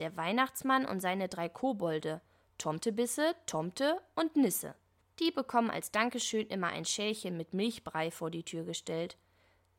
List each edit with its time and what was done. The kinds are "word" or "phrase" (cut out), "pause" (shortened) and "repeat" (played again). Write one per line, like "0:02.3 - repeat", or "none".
none

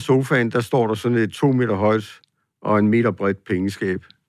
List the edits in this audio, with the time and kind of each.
none

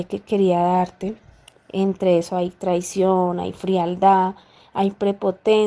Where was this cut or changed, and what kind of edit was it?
0:01.6 - word

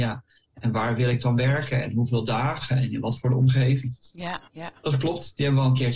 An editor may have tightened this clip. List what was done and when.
0:04.5 - pause

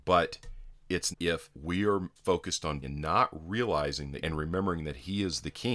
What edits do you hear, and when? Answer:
0:01.1 - phrase
0:01.5 - pause
0:02.2 - word
0:02.8 - word
0:04.2 - phrase

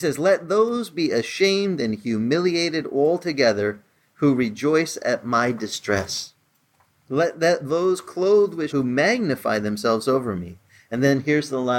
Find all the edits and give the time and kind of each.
0:08.7 - phrase

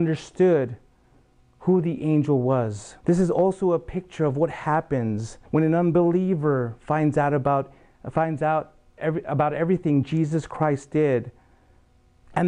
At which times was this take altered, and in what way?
0:03.0 - pause
0:05.5 - pause

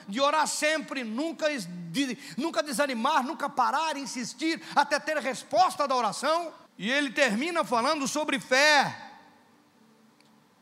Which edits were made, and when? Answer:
0:06.7 - pause

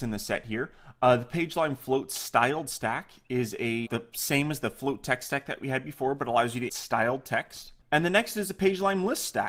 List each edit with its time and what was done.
0:03.9 - word
0:06.7 - word
0:07.8 - pause

